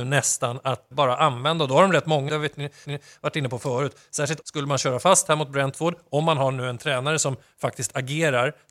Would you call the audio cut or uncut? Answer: cut